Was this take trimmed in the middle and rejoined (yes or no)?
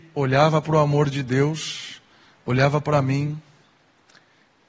no